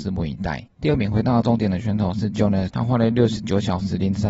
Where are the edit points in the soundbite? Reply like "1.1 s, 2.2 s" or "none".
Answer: 2.7 s